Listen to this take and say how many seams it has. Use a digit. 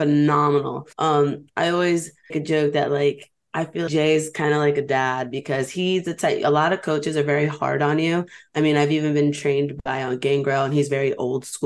3